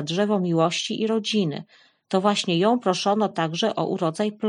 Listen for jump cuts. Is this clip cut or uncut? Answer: uncut